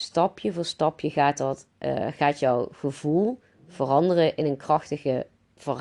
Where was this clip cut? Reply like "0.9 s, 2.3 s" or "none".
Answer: 1.7 s